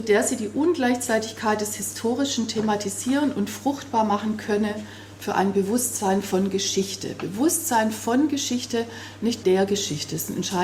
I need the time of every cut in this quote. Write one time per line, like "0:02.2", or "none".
0:09.4